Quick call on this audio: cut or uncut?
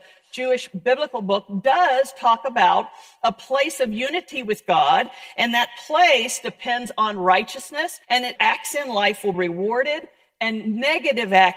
cut